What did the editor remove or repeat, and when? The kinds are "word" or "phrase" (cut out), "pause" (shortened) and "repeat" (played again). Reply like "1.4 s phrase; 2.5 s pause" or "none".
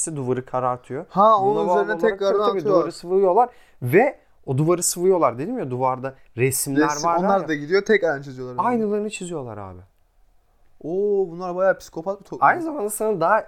none